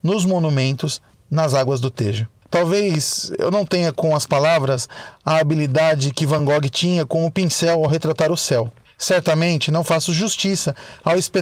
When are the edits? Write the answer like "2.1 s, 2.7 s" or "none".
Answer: none